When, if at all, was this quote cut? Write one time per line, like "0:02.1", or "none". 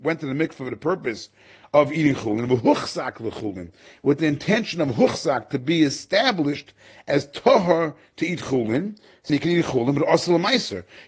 0:09.3